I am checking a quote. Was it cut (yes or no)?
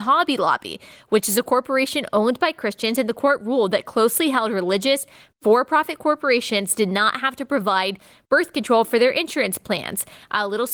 no